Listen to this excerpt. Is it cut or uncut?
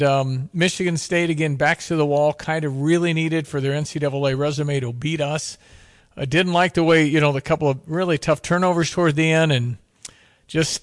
uncut